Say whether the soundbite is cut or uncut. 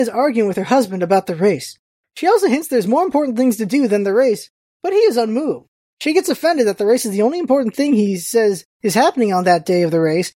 uncut